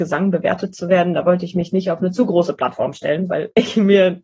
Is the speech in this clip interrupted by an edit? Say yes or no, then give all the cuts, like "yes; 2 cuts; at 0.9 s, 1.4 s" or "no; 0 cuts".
no; 0 cuts